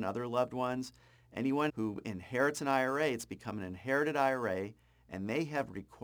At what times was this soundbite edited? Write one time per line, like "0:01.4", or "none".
0:01.7